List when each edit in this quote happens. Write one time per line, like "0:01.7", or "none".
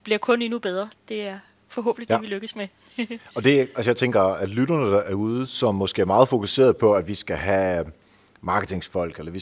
none